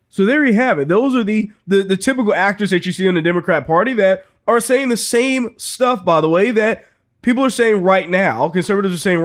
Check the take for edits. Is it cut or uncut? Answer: uncut